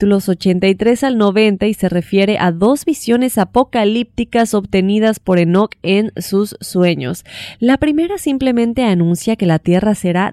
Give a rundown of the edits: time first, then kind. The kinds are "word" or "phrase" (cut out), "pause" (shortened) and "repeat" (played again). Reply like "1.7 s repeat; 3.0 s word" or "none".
none